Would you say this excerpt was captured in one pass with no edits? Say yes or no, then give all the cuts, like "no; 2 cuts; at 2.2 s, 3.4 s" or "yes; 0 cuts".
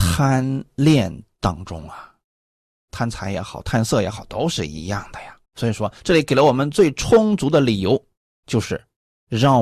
no; 2 cuts; at 5.4 s, 6.0 s